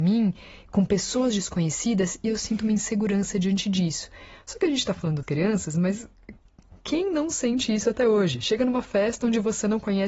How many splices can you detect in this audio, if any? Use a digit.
1